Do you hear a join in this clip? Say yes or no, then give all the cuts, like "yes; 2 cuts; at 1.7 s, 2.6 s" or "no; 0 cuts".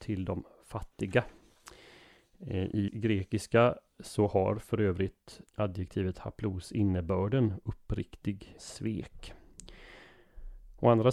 yes; 3 cuts; at 2.9 s, 5.5 s, 8.6 s